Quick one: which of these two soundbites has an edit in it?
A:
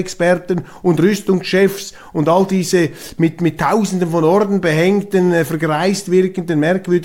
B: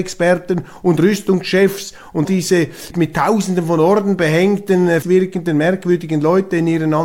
B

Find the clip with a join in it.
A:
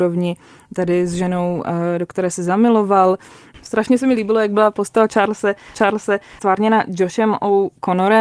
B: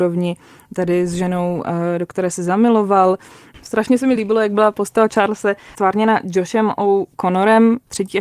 A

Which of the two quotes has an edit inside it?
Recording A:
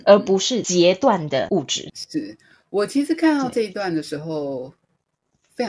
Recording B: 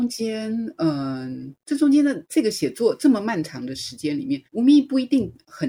B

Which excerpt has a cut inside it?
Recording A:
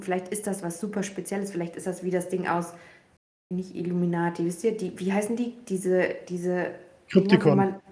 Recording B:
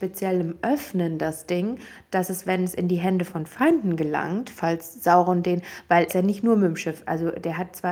B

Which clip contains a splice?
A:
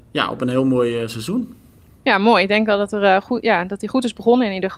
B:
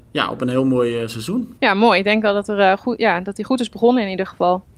B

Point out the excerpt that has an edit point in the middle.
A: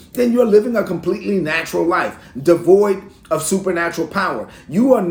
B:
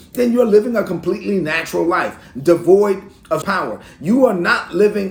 B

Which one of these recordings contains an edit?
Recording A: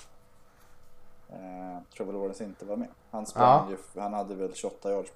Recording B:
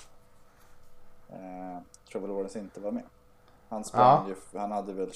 A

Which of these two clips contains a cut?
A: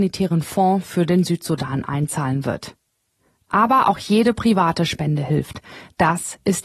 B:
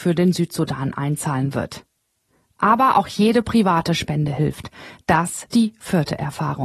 B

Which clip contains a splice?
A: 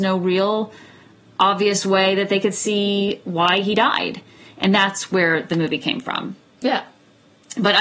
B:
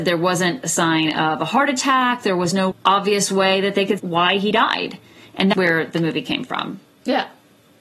B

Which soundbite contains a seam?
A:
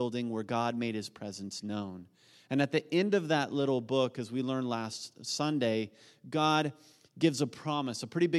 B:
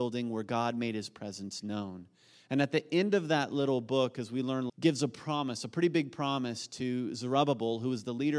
B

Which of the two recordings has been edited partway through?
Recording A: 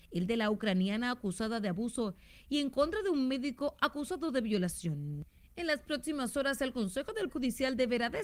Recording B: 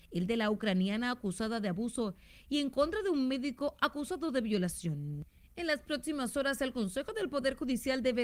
A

